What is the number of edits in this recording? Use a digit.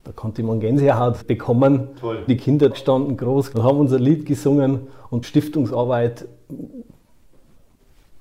5